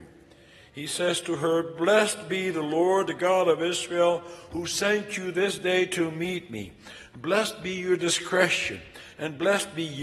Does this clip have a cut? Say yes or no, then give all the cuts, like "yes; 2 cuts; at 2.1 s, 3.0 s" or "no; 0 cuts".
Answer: no; 0 cuts